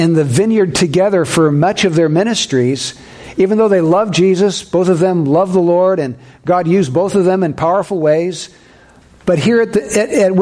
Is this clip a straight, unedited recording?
yes; 0 cuts

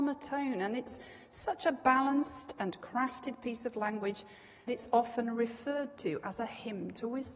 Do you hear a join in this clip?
yes; 1 cut; at 4.7 s

